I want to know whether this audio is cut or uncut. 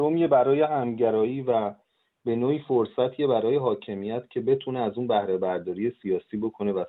uncut